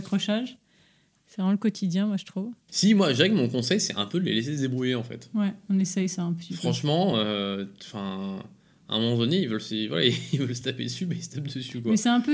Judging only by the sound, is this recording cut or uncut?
uncut